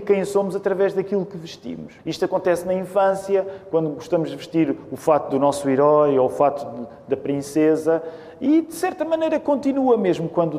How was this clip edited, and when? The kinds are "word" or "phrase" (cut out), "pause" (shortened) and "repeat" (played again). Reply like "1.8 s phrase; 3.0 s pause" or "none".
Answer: 2.0 s pause